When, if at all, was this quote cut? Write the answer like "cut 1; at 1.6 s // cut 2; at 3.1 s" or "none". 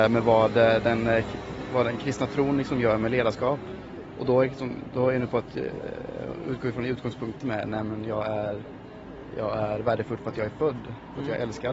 none